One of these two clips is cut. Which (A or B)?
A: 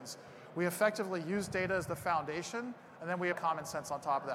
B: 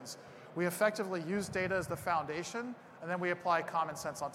A